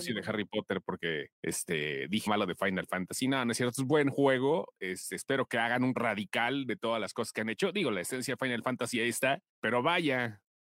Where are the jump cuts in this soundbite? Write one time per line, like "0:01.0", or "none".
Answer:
0:01.3
0:02.3
0:06.0
0:09.5